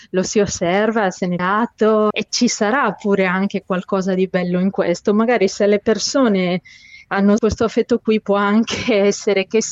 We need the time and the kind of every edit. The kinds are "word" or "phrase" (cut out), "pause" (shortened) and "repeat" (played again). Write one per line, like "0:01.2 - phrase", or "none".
0:01.4 - word
0:02.1 - word
0:07.4 - word